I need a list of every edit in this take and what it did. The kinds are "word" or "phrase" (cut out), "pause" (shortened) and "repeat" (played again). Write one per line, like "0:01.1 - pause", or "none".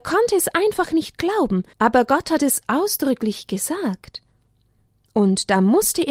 0:01.7 - pause